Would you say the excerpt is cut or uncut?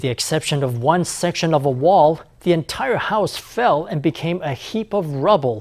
uncut